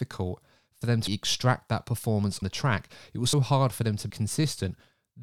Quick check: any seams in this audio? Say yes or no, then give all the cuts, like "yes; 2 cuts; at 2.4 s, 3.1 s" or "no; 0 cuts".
yes; 4 cuts; at 1.1 s, 2.4 s, 3.3 s, 4.1 s